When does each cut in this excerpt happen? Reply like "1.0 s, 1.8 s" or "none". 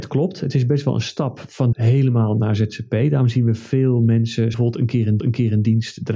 1.7 s, 4.5 s, 5.2 s